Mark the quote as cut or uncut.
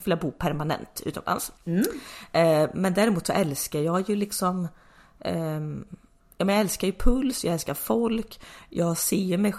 cut